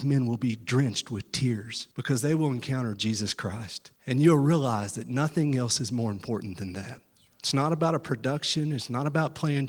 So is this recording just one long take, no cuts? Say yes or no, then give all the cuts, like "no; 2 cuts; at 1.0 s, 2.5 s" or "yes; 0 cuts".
no; 3 cuts; at 1.9 s, 4.0 s, 7.1 s